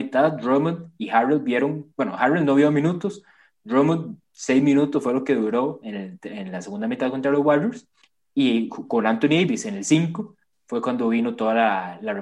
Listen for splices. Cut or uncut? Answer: uncut